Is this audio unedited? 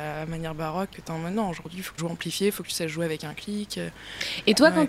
no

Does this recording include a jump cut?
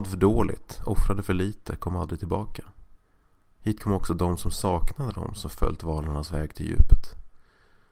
no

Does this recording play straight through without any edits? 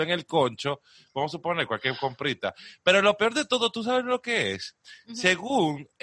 yes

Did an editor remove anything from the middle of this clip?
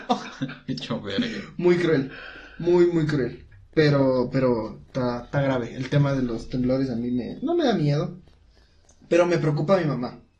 yes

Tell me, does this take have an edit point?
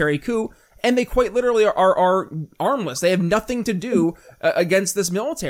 no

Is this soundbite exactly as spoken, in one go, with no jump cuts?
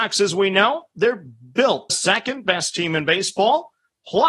no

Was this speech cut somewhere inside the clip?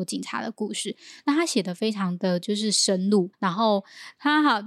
yes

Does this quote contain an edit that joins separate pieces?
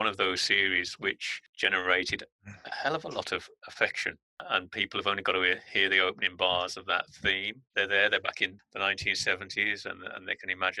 no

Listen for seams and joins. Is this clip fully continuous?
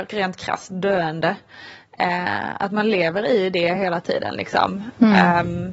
yes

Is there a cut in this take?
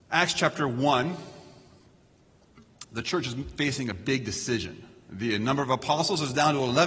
no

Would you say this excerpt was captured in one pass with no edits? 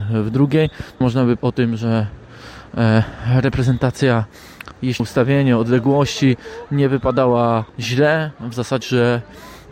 no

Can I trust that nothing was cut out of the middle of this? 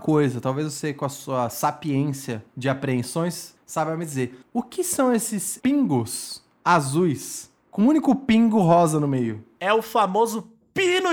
no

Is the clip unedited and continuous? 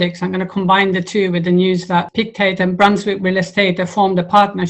yes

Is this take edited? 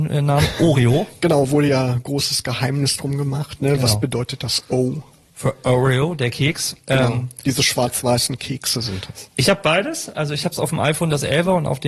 no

